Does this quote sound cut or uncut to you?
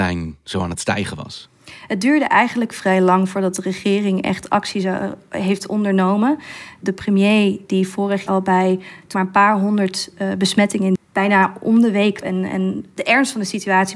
cut